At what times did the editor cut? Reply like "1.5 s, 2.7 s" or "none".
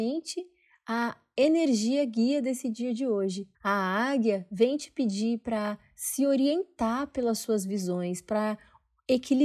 3.5 s